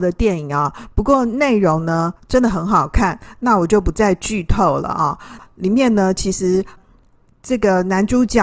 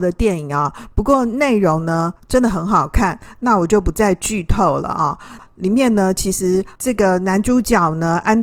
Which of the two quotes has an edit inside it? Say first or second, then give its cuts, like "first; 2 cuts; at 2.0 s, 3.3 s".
second; 1 cut; at 6.8 s